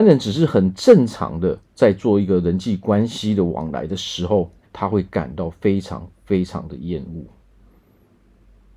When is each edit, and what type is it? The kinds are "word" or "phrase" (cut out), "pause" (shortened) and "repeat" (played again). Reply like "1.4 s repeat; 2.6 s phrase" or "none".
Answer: 1.8 s word; 4.6 s pause